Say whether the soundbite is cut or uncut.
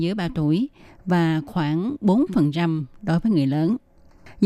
uncut